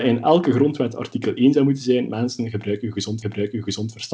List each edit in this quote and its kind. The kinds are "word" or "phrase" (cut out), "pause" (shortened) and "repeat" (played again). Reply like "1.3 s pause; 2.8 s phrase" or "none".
3.2 s repeat